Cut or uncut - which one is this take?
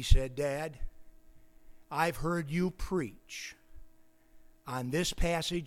uncut